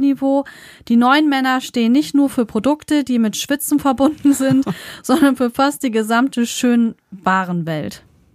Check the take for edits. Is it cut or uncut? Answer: uncut